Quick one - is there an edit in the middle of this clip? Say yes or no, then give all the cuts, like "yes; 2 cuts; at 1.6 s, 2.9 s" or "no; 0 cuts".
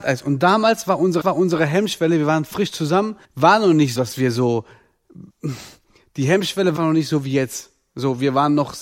yes; 5 cuts; at 1.2 s, 3.2 s, 4.0 s, 5.3 s, 6.8 s